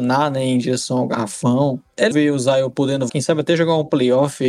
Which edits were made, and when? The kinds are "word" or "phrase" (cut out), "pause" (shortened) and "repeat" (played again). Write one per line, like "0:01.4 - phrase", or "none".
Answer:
0:02.1 - word
0:03.1 - word